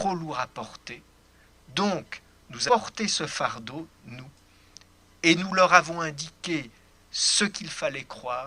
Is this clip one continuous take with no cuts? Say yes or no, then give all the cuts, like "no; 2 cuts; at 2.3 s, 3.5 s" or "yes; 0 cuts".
no; 1 cut; at 2.7 s